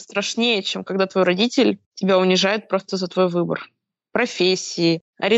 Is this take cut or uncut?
uncut